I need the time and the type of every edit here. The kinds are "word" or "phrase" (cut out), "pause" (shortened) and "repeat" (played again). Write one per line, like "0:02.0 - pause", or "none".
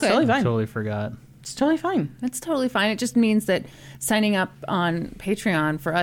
none